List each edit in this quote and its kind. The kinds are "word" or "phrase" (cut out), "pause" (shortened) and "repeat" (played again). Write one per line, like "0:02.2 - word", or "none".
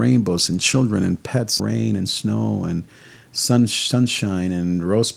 0:01.6 - phrase